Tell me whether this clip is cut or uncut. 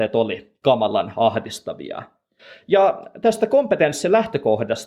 uncut